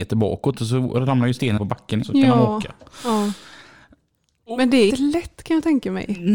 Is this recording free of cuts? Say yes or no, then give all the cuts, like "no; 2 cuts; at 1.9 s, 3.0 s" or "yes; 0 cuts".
no; 3 cuts; at 1.6 s, 2.0 s, 4.9 s